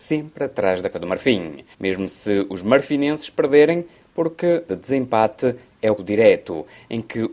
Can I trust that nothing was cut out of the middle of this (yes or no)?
no